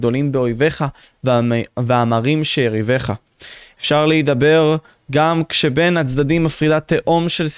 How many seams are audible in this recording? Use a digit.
0